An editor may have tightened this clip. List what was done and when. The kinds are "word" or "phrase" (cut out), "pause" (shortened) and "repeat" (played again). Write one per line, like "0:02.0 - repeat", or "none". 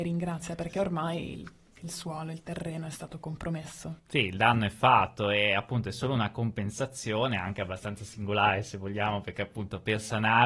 none